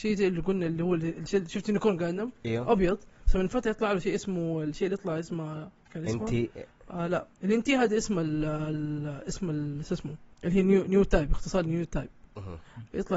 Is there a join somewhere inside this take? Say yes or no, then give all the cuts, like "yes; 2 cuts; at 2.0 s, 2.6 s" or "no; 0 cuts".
yes; 2 cuts; at 5.8 s, 10.3 s